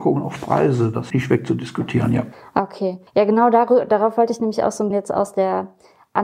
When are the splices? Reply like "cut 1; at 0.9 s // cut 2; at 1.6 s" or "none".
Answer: cut 1; at 1.1 s // cut 2; at 3.1 s // cut 3; at 4.9 s